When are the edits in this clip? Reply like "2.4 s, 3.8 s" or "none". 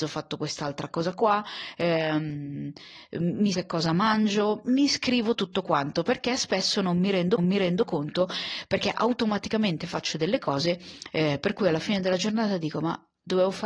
3.5 s, 7.4 s